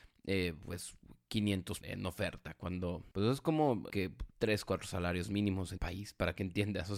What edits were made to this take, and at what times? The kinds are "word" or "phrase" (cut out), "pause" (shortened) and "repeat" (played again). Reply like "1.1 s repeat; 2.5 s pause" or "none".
1.8 s word; 3.1 s pause; 3.9 s word; 4.3 s phrase; 5.8 s word